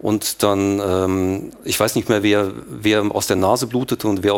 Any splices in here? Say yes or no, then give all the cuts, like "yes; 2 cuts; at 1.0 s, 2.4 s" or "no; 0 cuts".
no; 0 cuts